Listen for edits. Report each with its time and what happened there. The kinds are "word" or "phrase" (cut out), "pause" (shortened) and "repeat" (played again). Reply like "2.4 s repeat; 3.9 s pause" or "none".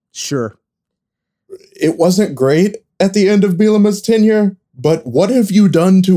none